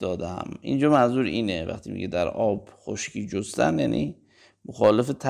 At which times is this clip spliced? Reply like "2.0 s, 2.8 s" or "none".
none